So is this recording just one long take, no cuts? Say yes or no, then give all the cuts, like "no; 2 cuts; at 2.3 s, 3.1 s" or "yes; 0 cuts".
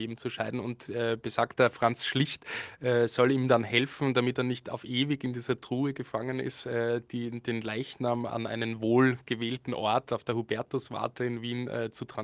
yes; 0 cuts